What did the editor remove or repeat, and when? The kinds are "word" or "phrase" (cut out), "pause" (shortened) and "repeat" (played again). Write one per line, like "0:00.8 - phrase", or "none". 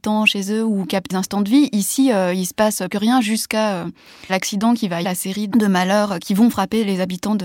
0:01.1 - word
0:02.9 - word
0:04.3 - word
0:05.0 - word
0:05.5 - word